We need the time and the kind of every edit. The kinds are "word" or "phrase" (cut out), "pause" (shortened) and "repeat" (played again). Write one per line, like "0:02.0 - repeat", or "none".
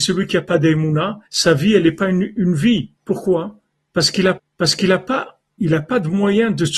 0:01.3 - pause
0:03.0 - pause
0:04.4 - repeat